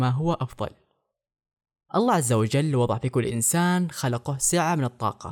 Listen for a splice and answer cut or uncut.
uncut